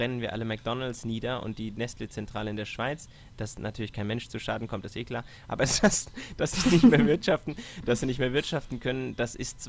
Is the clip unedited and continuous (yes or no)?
yes